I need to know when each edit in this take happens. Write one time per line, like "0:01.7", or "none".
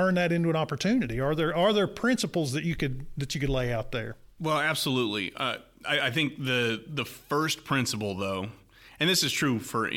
none